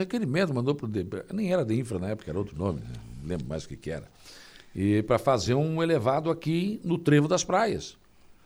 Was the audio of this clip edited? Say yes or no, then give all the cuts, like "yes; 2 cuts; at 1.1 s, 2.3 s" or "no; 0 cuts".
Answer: no; 0 cuts